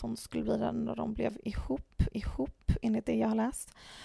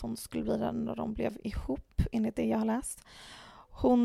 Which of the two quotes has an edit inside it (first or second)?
first